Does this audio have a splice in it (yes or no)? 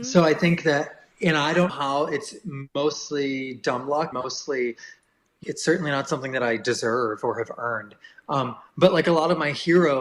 yes